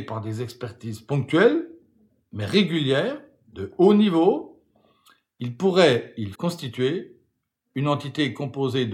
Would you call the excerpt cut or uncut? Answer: cut